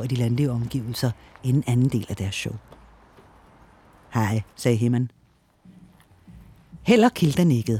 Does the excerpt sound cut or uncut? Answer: cut